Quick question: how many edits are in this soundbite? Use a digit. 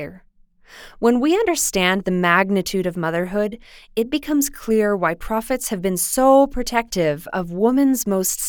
0